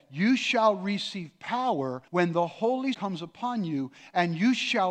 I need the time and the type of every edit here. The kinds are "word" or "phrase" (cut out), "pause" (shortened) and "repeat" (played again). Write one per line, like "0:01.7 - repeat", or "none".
0:02.1 - pause
0:02.9 - word